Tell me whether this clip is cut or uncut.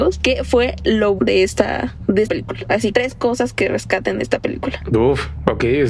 cut